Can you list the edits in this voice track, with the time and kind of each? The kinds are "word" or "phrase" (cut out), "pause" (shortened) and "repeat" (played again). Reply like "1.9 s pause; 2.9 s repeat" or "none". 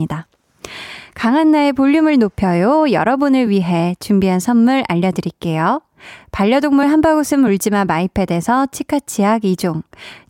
none